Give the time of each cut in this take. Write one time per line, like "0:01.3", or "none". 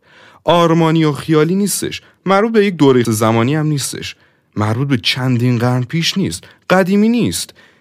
0:03.0